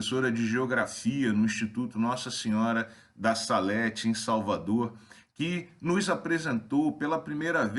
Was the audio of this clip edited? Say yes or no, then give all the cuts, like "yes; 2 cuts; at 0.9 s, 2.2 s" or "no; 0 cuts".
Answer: no; 0 cuts